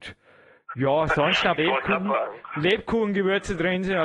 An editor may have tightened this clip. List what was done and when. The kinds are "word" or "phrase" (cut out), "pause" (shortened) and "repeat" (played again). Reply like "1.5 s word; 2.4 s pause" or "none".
1.6 s word